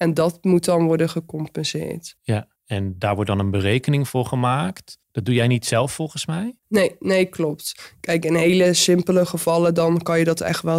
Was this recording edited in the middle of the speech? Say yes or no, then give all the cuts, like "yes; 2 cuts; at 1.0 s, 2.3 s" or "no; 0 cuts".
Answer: yes; 3 cuts; at 2.6 s, 5.0 s, 6.6 s